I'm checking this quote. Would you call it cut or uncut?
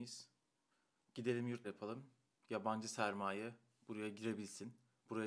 cut